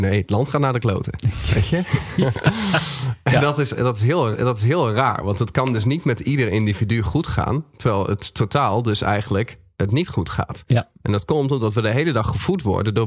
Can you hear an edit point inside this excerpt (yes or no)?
yes